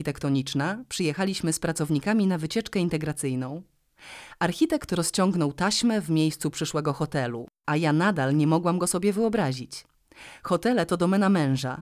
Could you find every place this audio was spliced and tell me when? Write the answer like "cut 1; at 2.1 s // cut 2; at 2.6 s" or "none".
none